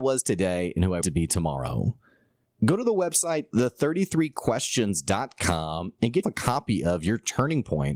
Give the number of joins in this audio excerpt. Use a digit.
2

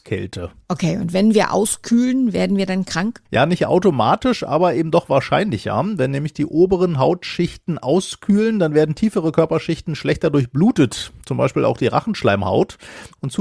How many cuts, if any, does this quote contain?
1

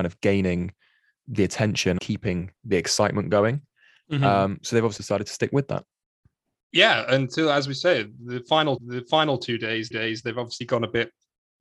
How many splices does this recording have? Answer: 4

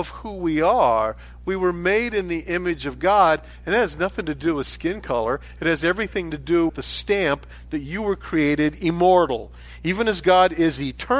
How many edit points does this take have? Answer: 1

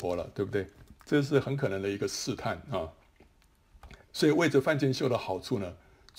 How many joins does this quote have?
1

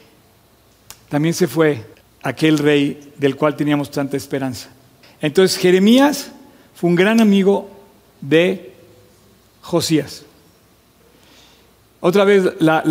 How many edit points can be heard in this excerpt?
2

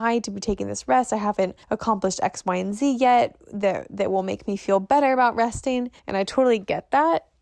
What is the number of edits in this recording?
2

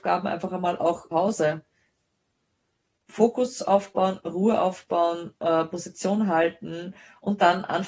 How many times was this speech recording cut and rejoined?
1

